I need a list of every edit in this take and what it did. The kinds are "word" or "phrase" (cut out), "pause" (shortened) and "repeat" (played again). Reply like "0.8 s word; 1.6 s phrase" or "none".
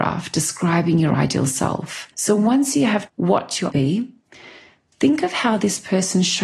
2.1 s pause; 3.1 s word; 3.7 s phrase